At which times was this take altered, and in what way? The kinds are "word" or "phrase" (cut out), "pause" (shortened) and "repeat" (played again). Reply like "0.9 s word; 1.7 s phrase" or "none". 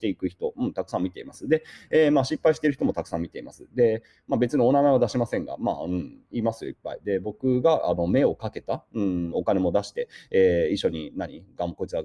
9.3 s phrase